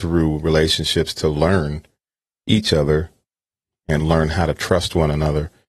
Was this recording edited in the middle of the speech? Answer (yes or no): no